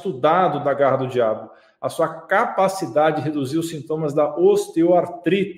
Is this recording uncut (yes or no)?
yes